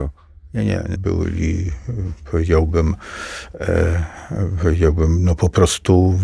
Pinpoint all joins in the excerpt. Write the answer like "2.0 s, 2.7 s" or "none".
1.0 s